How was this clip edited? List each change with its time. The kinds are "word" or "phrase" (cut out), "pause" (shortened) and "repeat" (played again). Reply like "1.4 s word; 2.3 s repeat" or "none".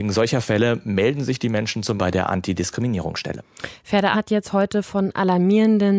2.0 s word; 4.1 s word

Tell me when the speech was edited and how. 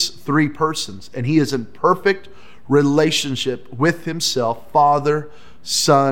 none

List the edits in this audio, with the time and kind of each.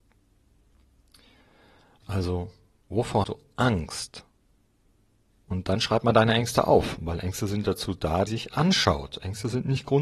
3.2 s word; 8.3 s phrase

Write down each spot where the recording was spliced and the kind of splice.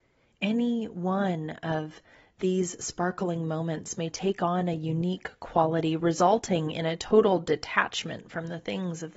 none

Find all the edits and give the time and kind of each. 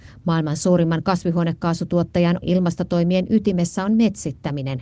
2.4 s word

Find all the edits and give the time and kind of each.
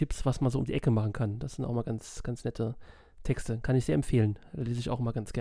none

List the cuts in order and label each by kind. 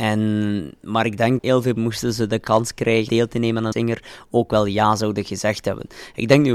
1.4 s word; 1.8 s word; 3.1 s word; 3.7 s word

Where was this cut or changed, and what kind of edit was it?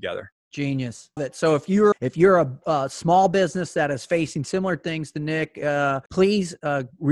1.2 s word; 1.9 s word; 6.1 s pause

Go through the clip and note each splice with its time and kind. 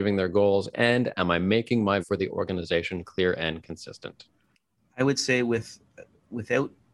2.0 s word

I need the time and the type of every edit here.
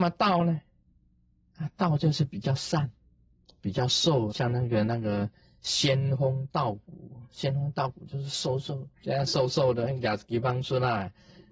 4.3 s word; 9.0 s pause

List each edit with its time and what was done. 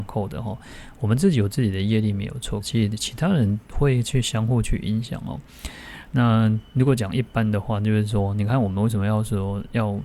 2.6 s phrase; 6.7 s pause

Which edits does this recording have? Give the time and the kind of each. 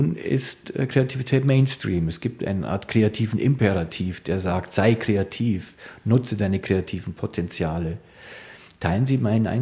none

